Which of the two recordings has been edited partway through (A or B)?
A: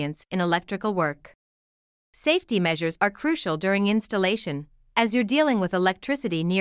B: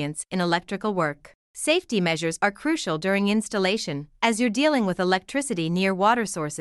B